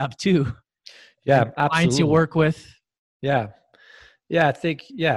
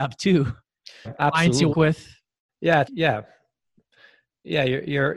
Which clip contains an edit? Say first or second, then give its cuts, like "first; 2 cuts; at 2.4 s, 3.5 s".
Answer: second; 4 cuts; at 1.1 s, 1.7 s, 2.5 s, 2.8 s